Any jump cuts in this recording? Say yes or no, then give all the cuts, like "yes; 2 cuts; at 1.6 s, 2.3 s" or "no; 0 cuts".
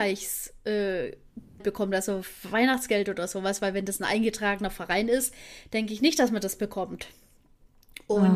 yes; 1 cut; at 1.6 s